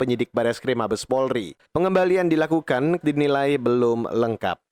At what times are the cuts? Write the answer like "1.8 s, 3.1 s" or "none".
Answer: 1.6 s, 3.0 s